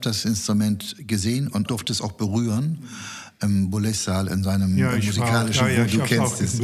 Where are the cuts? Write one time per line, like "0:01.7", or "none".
0:01.7